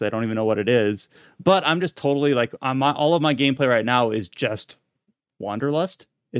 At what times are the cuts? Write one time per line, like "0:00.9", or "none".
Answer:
none